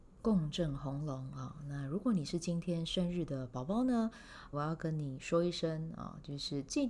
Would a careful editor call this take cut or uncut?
cut